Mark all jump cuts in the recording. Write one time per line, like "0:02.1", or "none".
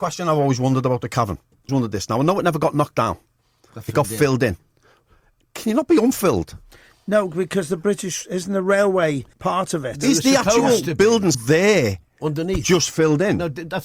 0:01.7
0:09.3
0:11.3